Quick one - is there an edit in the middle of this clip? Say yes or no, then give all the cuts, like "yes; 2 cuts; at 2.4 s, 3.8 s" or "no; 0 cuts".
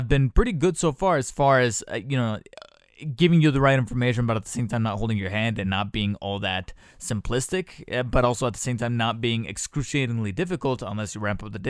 no; 0 cuts